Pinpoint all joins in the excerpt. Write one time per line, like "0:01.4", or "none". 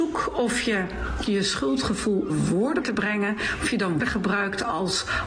0:01.3
0:02.3
0:02.8
0:04.0